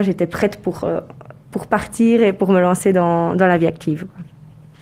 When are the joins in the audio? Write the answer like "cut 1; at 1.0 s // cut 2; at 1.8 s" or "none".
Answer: cut 1; at 1.4 s